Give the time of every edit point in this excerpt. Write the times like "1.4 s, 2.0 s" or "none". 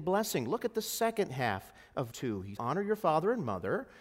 2.1 s, 2.6 s